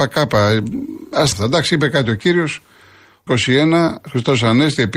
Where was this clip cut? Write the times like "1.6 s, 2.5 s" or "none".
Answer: 1.3 s, 3.3 s